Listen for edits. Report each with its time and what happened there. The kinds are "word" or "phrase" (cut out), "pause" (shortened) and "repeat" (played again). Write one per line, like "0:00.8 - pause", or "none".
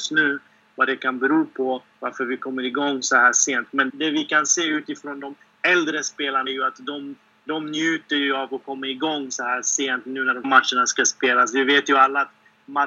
0:03.9 - word
0:06.5 - word
0:10.4 - word